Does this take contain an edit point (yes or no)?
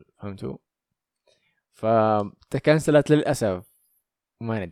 no